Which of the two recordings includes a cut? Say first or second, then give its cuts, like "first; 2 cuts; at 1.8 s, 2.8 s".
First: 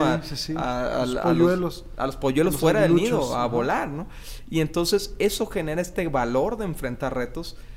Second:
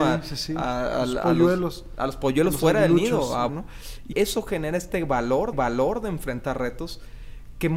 second; 3 cuts; at 3.5 s, 4.1 s, 5.5 s